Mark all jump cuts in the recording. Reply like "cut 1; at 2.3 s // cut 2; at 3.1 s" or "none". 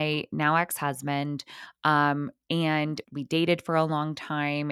cut 1; at 3.0 s